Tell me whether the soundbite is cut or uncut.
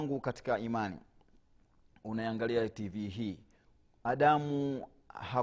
uncut